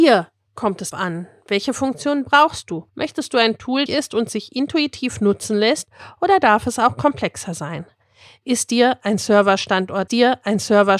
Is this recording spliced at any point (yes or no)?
yes